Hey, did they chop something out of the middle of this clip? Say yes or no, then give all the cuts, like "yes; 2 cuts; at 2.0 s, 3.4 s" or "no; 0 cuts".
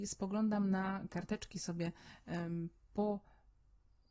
yes; 1 cut; at 1.1 s